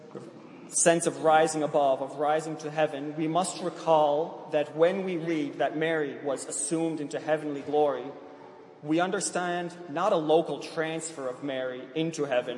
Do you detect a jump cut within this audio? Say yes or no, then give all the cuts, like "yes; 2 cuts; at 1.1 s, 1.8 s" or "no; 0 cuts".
no; 0 cuts